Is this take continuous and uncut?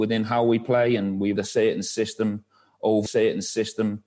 no; 2 cuts; at 1.4 s, 3.1 s

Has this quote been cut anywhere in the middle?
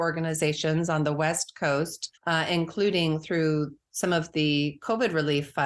no; 0 cuts

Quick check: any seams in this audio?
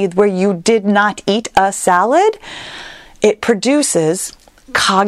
no; 0 cuts

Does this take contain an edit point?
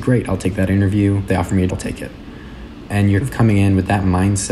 yes; 4 cuts; at 1.3 s, 1.7 s, 2.9 s, 3.2 s

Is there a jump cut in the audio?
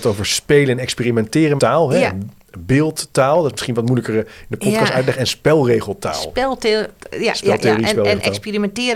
yes; 2 cuts; at 1.6 s, 5.2 s

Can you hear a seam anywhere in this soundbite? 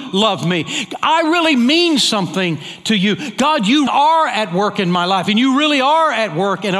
yes; 1 cut; at 3.9 s

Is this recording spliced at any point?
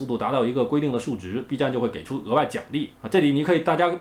yes; 1 cut; at 3.0 s

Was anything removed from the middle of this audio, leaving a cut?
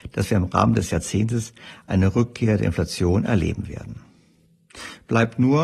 no; 0 cuts

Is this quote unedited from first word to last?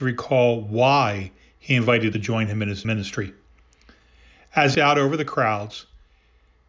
no; 3 cuts; at 2.1 s, 2.8 s, 4.7 s

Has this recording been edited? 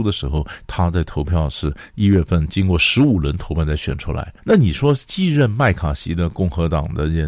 yes; 1 cut; at 4.4 s

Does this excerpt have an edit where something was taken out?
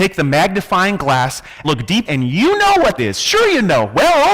yes; 3 cuts; at 1.6 s, 2.1 s, 3.0 s

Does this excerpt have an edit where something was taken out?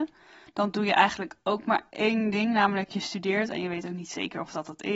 no; 0 cuts

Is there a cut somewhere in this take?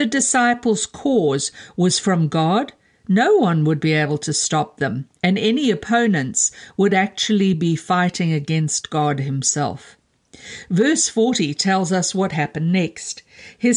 no; 0 cuts

